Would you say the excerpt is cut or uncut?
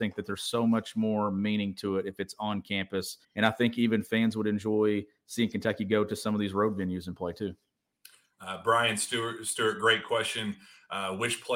cut